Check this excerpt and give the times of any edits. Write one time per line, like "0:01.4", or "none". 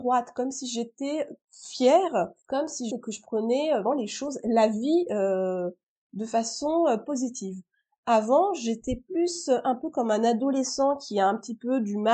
0:01.4
0:02.9
0:03.8